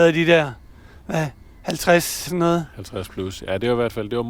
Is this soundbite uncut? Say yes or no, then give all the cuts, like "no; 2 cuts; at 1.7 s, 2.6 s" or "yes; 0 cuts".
no; 1 cut; at 2.3 s